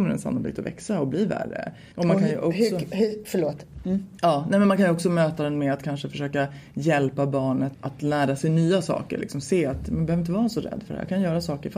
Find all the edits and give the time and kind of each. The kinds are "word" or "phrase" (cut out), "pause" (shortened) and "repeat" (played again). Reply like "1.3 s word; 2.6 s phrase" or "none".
1.9 s pause; 7.7 s word